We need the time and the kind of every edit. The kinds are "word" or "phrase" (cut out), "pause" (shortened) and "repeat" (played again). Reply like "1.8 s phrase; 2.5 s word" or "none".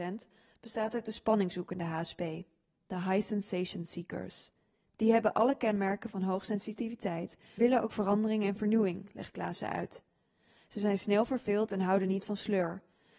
7.6 s word